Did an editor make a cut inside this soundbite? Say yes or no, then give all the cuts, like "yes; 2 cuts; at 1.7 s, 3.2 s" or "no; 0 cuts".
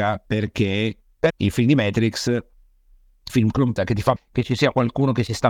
yes; 4 cuts; at 1.3 s, 3.3 s, 3.8 s, 4.2 s